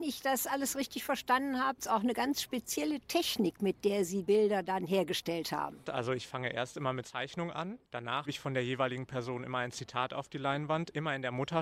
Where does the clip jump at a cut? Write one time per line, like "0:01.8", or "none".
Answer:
0:01.8
0:04.3
0:07.0
0:08.2